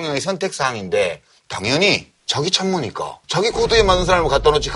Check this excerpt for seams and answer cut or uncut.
cut